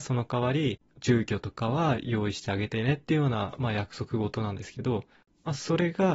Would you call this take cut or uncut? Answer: uncut